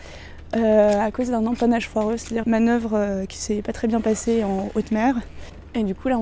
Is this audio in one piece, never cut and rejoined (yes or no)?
no